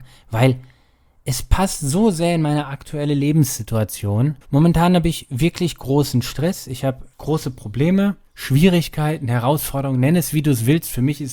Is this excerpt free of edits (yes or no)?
no